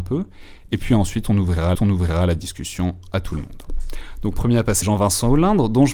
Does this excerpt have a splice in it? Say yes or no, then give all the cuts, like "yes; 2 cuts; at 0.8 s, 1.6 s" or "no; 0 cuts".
yes; 3 cuts; at 1.7 s, 4.3 s, 4.8 s